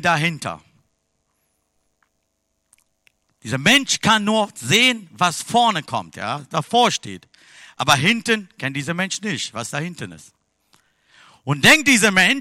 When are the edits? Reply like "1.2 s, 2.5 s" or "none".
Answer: none